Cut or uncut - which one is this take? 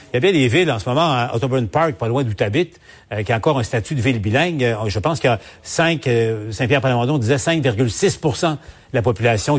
uncut